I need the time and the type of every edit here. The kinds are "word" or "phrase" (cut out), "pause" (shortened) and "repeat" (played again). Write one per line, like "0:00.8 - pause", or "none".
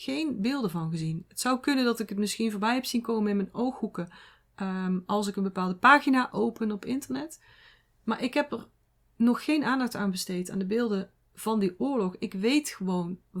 none